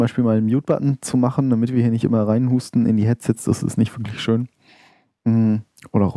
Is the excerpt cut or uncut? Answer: uncut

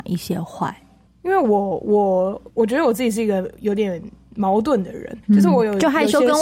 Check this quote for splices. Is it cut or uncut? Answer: cut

